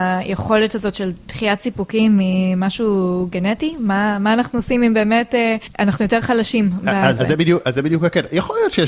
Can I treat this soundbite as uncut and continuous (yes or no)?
no